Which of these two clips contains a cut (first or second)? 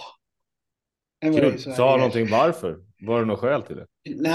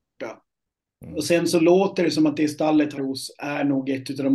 second